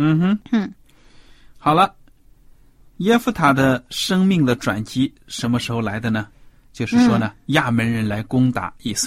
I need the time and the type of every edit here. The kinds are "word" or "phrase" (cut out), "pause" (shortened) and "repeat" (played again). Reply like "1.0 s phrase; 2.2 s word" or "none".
none